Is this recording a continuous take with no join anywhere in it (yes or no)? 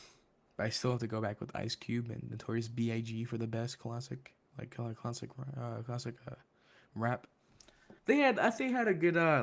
no